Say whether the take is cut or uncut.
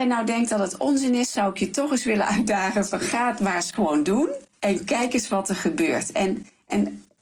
uncut